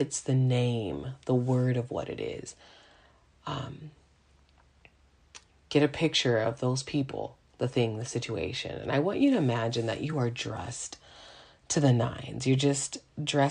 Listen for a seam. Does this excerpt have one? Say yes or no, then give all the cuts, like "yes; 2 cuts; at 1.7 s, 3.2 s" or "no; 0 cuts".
no; 0 cuts